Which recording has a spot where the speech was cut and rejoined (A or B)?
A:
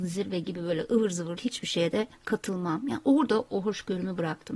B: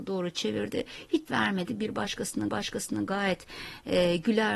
B